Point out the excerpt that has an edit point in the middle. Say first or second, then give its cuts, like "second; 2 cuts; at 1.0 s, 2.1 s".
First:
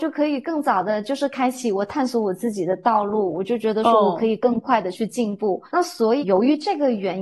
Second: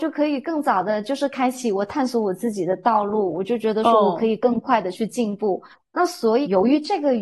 first; 1 cut; at 5.7 s